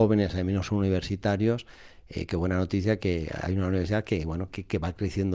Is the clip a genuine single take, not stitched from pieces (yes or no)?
yes